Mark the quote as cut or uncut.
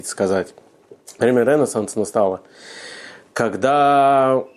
uncut